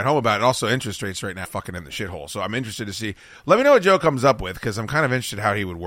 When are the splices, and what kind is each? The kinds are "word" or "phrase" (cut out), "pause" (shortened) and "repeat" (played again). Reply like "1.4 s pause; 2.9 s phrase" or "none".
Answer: 1.4 s word